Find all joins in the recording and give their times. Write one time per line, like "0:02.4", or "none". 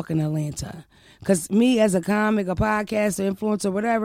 none